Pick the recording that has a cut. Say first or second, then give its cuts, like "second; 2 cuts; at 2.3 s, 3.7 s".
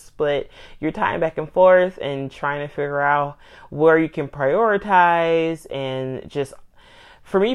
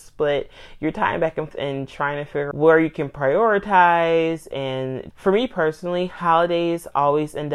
second; 3 cuts; at 1.5 s, 2.5 s, 5.1 s